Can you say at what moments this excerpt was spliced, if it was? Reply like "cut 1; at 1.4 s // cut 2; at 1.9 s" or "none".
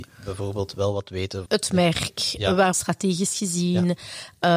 cut 1; at 1.5 s // cut 2; at 2.7 s